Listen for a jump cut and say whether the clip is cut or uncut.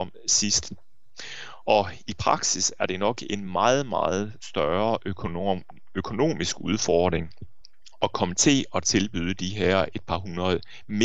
uncut